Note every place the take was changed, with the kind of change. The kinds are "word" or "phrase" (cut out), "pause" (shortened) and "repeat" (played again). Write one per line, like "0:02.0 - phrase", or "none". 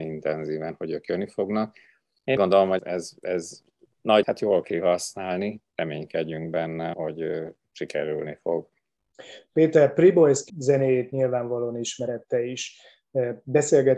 0:02.4 - word
0:02.8 - word
0:04.2 - word
0:04.6 - word
0:06.9 - word
0:10.5 - word